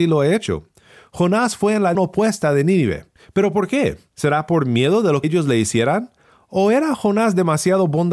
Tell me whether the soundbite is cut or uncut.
cut